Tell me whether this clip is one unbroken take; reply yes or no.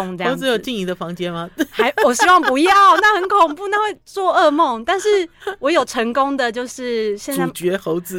no